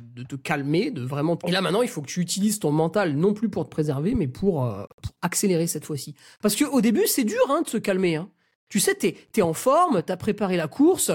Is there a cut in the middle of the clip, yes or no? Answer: yes